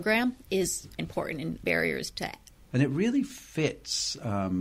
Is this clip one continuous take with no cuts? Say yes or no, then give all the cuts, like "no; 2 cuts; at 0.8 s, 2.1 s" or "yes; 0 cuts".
no; 3 cuts; at 1.0 s, 1.6 s, 2.7 s